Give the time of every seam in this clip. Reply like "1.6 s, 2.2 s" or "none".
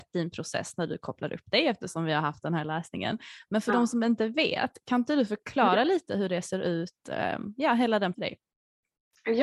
8.1 s